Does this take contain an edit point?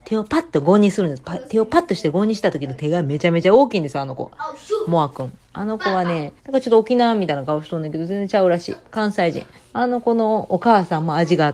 yes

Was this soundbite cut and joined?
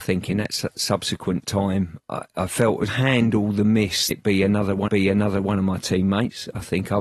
yes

